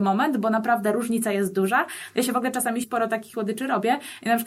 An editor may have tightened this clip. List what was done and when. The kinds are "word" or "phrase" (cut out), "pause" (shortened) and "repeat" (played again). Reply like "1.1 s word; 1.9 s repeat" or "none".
2.8 s phrase; 3.3 s word